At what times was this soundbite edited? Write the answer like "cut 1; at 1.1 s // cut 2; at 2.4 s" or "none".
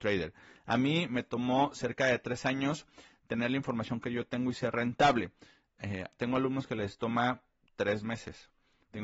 none